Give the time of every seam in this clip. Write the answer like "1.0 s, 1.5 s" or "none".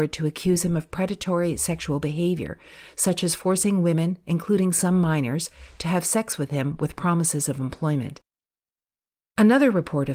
none